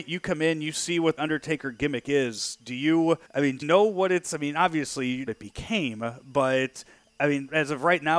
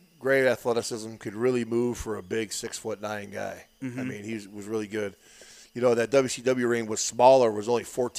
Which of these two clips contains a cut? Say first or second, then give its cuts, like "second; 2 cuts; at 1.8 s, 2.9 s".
first; 4 cuts; at 1.2 s, 3.2 s, 3.6 s, 5.3 s